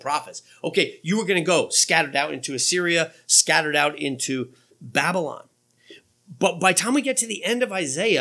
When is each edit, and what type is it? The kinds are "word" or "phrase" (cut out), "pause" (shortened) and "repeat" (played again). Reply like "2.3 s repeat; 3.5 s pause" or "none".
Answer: none